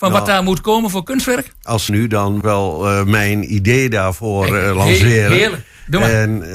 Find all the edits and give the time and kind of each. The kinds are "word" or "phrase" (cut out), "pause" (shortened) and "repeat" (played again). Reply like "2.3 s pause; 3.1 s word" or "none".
1.9 s phrase; 2.4 s phrase

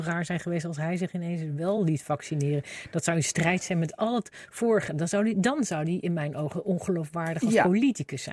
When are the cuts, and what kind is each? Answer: none

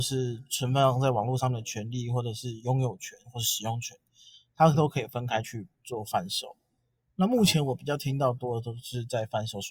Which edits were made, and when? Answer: 5.7 s pause

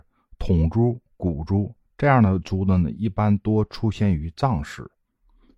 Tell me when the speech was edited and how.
1.9 s pause

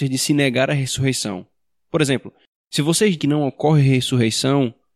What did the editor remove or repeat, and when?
3.2 s word

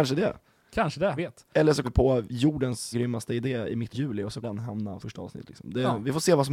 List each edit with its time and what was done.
1.2 s word; 1.8 s word; 2.9 s word; 3.9 s word; 4.4 s word; 5.0 s word

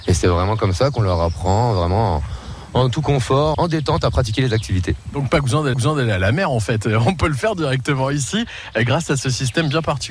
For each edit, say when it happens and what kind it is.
3.5 s word; 5.7 s repeat

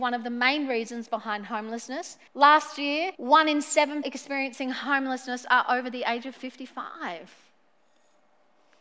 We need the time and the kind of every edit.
2.3 s pause; 3.1 s pause; 4.0 s word

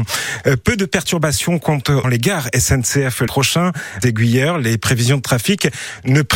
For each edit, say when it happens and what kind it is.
2.0 s word; 3.3 s word; 4.0 s phrase

